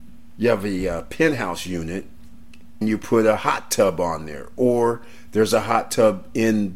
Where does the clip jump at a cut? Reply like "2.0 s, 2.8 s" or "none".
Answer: 2.8 s